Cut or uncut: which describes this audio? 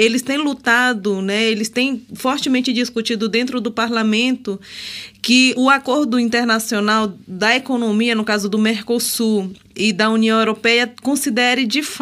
cut